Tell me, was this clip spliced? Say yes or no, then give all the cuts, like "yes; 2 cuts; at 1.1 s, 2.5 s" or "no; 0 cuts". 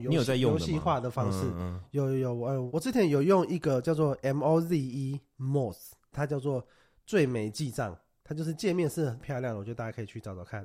no; 0 cuts